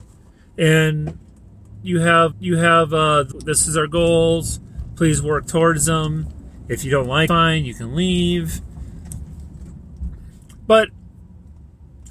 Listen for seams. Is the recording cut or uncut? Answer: cut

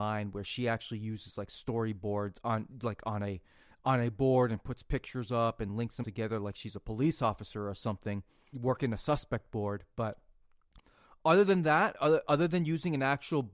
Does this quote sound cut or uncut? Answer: cut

